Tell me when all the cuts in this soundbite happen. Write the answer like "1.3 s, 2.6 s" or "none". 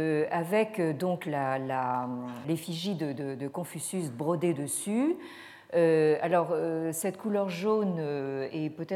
2.4 s

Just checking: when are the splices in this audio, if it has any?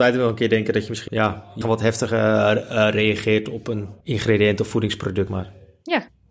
1.1 s, 1.6 s, 4.0 s, 5.3 s

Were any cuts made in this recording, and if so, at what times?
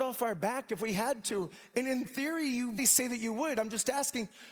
2.8 s

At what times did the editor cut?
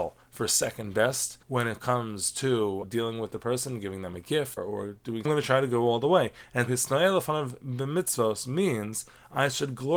1.4 s, 2.8 s, 4.6 s, 5.2 s, 6.7 s

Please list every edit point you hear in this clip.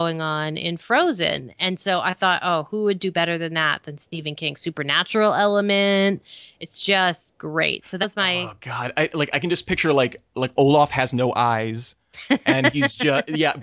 8.0 s

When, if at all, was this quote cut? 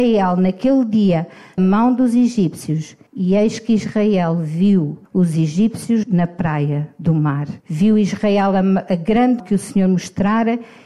1.6 s, 3.1 s, 5.0 s, 6.0 s, 7.6 s, 9.4 s

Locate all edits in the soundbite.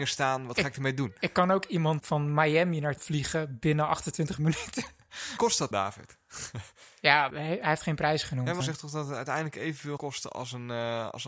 2.0 s, 3.0 s, 5.4 s, 5.7 s, 7.3 s, 8.6 s, 10.0 s

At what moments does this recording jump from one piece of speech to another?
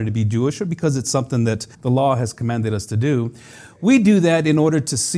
1.7 s

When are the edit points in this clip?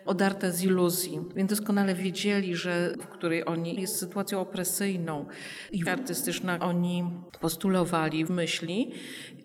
1.5 s, 3.0 s, 3.8 s, 5.9 s, 6.6 s, 8.3 s

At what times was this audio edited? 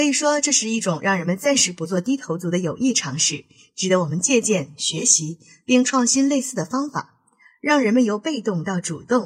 none

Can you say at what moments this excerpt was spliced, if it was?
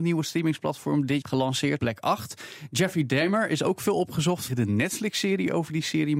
1.2 s, 1.8 s, 4.5 s

